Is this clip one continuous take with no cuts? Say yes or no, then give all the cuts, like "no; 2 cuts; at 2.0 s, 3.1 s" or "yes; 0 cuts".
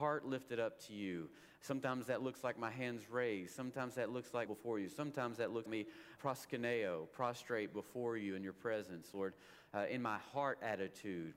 no; 3 cuts; at 4.5 s, 5.7 s, 6.2 s